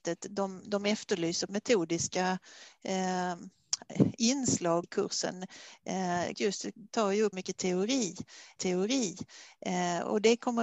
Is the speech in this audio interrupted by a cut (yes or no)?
yes